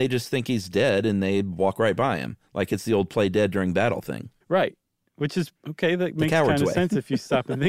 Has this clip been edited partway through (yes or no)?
yes